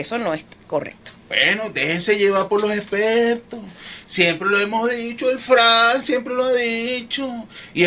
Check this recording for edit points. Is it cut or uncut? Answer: cut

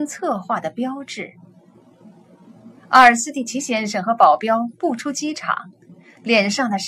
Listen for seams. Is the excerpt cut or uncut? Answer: cut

